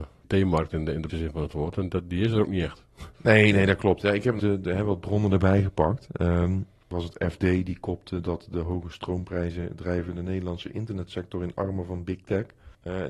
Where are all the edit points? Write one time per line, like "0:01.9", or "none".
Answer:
0:01.1
0:03.1
0:04.4

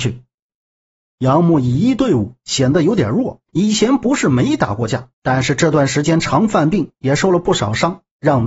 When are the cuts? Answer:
0:03.5
0:05.1

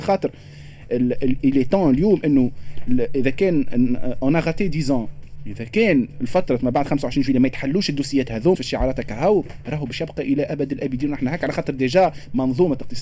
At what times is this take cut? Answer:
0:08.5

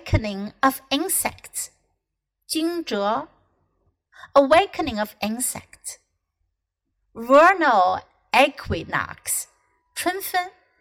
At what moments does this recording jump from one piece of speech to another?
none

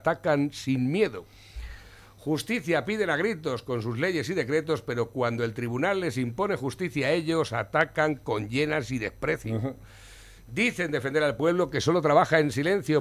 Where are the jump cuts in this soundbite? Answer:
none

